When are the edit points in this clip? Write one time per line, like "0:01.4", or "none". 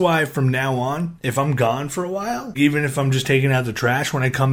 0:02.5

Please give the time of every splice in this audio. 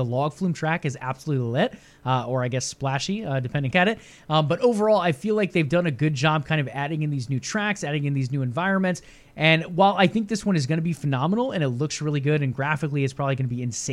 0:03.7

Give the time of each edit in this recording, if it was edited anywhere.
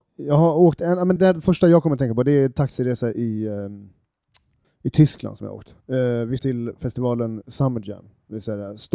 0:01.2
0:04.6
0:05.8
0:06.4

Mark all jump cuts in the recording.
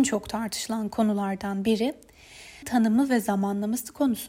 0:02.6

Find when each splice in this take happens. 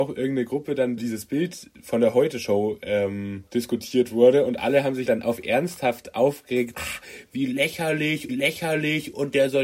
0:01.0
0:03.5
0:05.1
0:06.7
0:08.3

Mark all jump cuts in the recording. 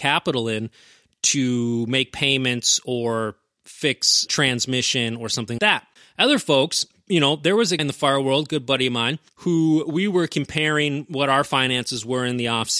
0:04.3
0:05.6
0:07.8

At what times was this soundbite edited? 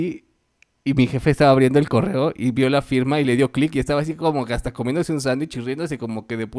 none

